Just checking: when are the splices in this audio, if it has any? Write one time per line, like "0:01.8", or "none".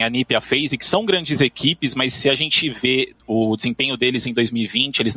0:03.2